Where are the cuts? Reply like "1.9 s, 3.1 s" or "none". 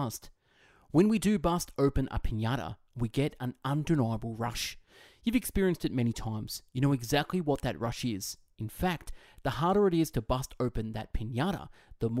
none